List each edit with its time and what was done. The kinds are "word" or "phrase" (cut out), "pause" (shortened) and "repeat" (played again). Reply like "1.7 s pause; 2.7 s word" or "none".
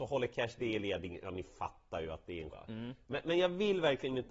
2.5 s word